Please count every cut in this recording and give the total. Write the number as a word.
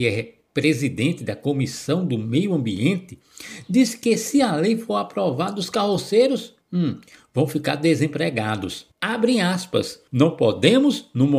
three